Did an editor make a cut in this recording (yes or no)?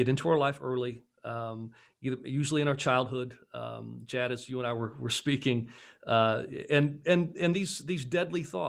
no